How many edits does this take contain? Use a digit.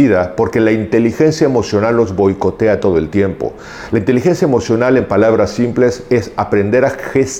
0